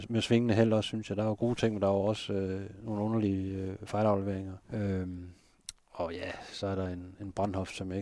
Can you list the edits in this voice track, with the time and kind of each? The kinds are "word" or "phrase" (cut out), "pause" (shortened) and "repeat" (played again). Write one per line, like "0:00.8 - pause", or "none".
0:04.6 - pause